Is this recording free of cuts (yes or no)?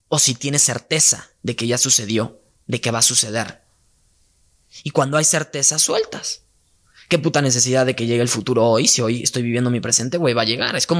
yes